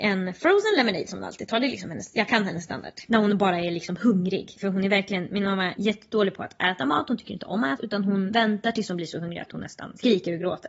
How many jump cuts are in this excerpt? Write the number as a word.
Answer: one